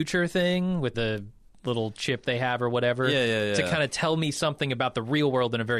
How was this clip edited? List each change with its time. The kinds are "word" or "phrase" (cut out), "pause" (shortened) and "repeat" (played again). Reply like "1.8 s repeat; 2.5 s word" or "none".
0.9 s word